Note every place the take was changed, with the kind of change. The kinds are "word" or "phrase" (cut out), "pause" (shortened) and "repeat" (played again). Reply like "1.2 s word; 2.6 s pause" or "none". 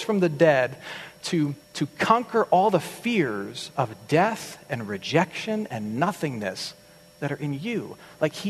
1.6 s pause